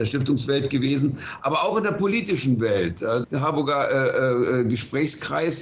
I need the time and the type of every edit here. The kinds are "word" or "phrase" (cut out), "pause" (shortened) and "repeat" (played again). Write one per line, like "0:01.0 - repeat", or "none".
0:03.2 - word